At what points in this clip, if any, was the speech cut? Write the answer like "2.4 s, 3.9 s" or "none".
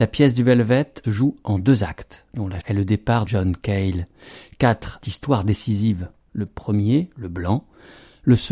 1.0 s, 2.6 s, 3.3 s, 5.0 s